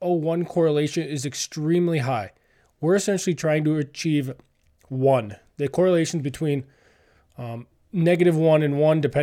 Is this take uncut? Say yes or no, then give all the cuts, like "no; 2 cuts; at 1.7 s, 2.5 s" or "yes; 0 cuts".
yes; 0 cuts